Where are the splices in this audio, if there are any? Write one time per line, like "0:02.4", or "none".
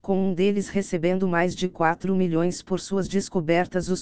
none